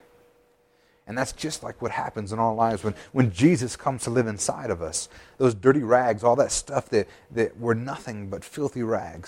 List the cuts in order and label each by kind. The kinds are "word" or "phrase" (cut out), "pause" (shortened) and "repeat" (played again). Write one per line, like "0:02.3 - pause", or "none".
none